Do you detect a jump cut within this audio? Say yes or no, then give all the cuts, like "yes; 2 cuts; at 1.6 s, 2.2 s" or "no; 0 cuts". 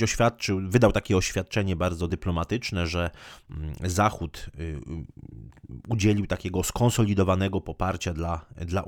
no; 0 cuts